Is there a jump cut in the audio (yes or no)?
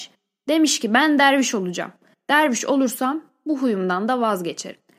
no